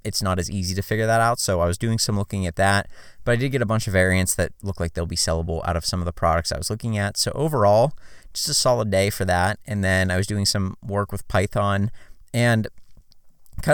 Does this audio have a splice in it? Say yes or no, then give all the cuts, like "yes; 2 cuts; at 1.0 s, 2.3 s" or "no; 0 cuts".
no; 0 cuts